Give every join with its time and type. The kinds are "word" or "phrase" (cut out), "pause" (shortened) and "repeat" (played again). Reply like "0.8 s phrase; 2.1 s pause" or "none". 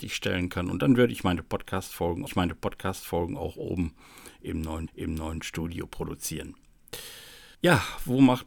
2.3 s repeat; 4.9 s repeat; 7.5 s pause